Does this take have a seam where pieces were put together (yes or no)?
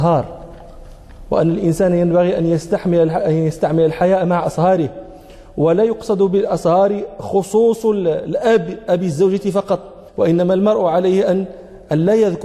yes